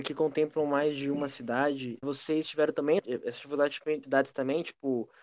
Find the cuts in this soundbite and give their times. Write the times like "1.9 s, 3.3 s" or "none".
2.0 s, 3.0 s, 4.0 s